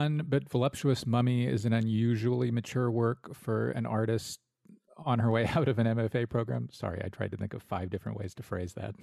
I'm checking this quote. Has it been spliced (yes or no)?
no